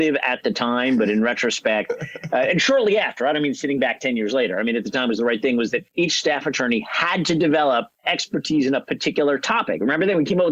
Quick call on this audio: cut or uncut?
cut